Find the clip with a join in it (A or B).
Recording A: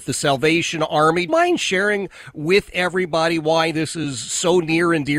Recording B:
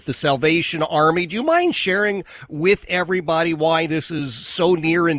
A